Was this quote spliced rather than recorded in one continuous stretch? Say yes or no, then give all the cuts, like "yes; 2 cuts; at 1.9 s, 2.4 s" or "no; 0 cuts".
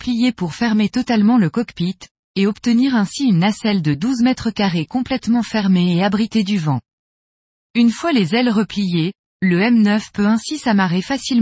no; 0 cuts